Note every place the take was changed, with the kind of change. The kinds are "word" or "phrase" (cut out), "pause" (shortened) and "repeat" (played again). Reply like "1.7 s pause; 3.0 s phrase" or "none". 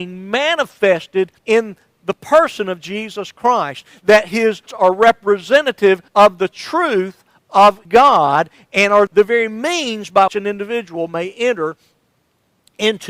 1.4 s pause; 4.7 s word; 6.1 s pause; 7.9 s pause; 9.1 s word; 10.3 s word